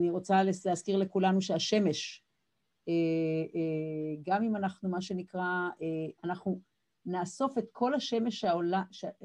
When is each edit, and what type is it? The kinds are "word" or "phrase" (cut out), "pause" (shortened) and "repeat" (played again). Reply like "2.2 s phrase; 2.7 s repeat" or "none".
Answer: 6.2 s pause